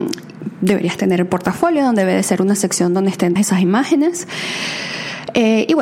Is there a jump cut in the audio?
yes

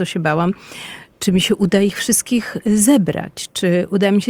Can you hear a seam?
no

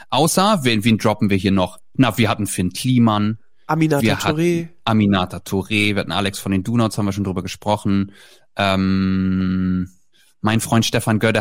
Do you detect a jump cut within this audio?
no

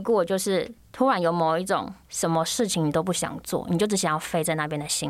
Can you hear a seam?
yes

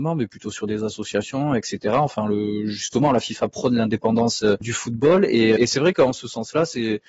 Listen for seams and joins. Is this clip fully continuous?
no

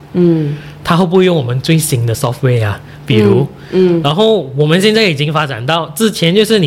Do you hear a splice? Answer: no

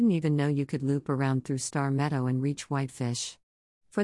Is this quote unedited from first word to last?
yes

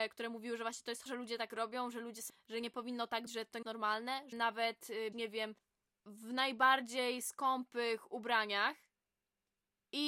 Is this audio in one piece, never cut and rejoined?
no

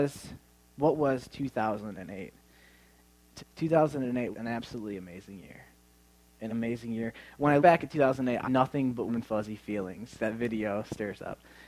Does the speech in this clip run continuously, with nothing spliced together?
no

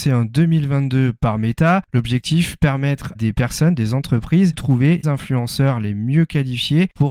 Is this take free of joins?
no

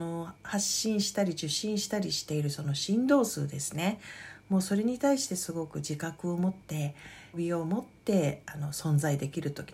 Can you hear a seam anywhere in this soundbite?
yes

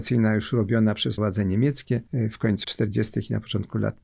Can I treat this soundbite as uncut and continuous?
no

